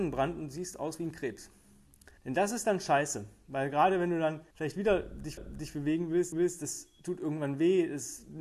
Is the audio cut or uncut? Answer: cut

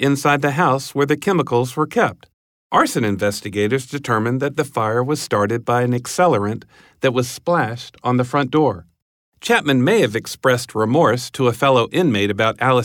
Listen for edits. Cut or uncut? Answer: uncut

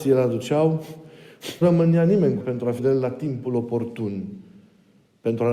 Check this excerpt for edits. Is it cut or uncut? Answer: cut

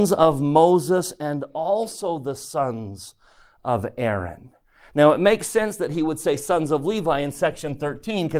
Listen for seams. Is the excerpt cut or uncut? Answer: cut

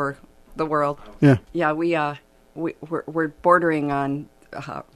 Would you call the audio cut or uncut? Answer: cut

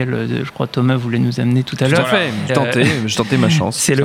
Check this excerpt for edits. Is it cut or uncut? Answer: cut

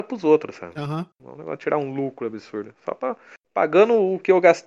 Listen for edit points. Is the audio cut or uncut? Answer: cut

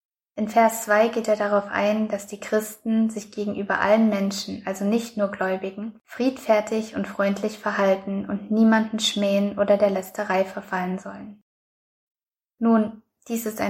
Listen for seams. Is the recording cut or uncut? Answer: cut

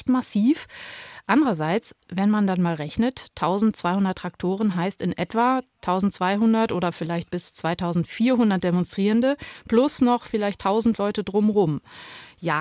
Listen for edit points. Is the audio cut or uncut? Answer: uncut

